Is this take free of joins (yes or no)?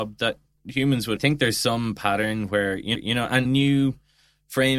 no